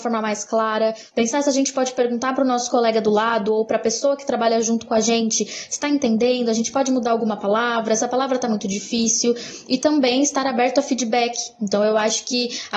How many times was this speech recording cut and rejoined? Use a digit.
0